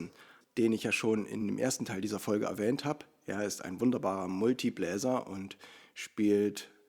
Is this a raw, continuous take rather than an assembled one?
yes; 0 cuts

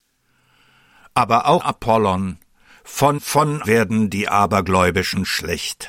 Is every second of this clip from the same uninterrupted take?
no; 3 cuts; at 1.6 s, 3.2 s, 3.6 s

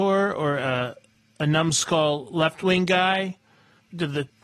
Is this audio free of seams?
yes; 0 cuts

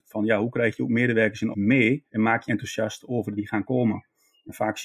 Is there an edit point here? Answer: yes; 4 cuts; at 1.5 s, 2.1 s, 2.5 s, 3.4 s

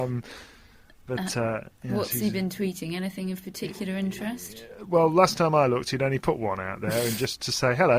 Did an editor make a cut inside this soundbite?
no; 0 cuts

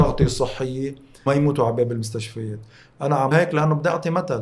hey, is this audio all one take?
no; 2 cuts; at 1.3 s, 3.3 s

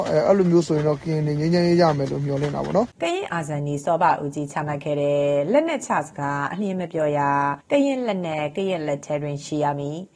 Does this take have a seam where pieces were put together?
yes; 2 cuts; at 2.9 s, 7.6 s

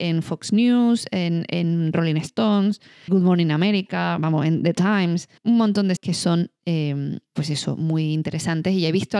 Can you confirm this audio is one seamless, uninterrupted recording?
no; 4 cuts; at 3.1 s, 5.4 s, 6.0 s, 7.3 s

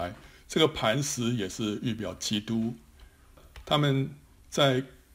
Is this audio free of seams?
yes; 0 cuts

